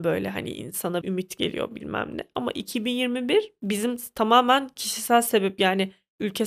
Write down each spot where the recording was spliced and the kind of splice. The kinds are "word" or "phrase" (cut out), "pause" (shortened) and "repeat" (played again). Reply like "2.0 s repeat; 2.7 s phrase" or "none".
1.0 s phrase